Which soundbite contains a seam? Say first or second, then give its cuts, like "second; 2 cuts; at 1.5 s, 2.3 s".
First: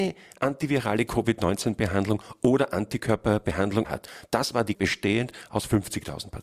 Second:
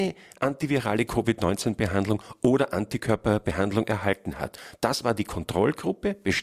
first; 2 cuts; at 3.8 s, 4.7 s